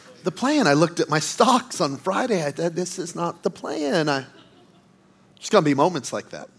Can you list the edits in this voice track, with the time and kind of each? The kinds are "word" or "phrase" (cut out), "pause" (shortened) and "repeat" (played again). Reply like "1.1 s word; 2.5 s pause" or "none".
none